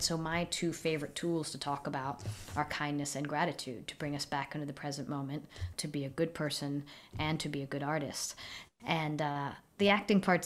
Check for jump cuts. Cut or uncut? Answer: cut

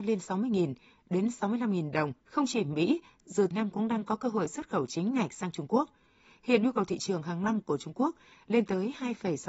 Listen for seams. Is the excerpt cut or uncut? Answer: cut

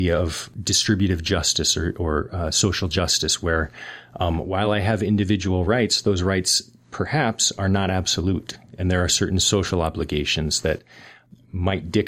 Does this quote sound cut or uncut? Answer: uncut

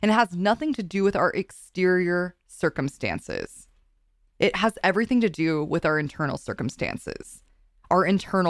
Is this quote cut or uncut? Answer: uncut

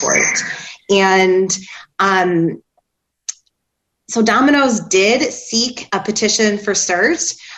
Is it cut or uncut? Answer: uncut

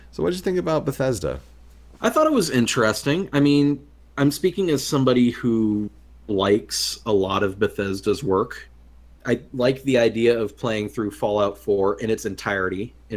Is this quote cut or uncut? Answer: uncut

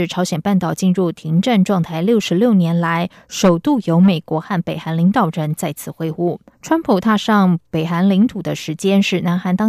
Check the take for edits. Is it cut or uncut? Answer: cut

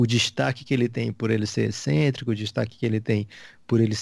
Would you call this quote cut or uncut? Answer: uncut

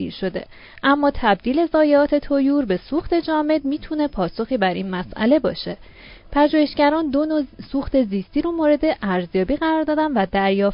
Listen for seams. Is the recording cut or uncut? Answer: uncut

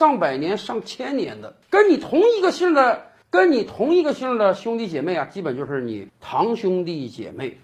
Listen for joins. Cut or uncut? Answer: cut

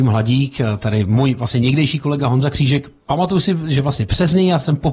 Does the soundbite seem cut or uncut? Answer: uncut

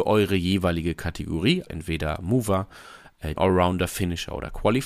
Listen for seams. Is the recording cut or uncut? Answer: cut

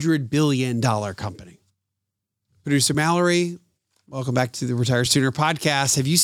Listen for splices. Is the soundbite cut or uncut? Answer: uncut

